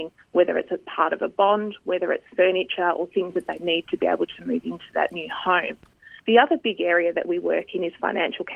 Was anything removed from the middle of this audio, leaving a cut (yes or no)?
yes